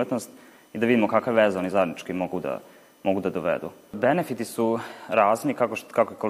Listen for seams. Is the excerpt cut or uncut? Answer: uncut